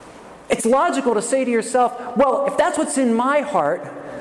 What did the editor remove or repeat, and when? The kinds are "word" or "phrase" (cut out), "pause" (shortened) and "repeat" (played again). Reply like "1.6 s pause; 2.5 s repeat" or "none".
none